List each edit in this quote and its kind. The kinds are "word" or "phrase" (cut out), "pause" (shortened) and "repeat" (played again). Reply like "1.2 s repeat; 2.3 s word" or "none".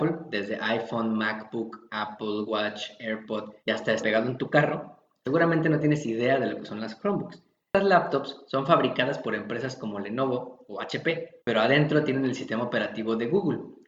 3.6 s pause; 4.0 s phrase; 11.4 s pause